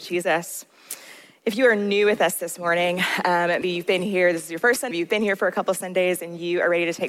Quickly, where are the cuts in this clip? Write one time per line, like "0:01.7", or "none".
0:03.6
0:04.9